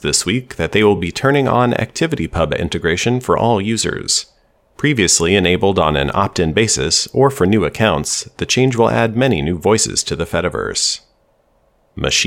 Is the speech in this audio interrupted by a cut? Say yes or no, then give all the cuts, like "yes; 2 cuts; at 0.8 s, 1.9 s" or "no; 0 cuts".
no; 0 cuts